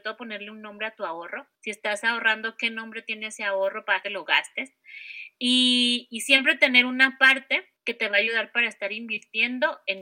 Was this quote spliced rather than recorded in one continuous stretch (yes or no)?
yes